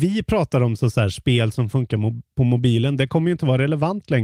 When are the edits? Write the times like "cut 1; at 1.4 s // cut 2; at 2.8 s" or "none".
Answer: none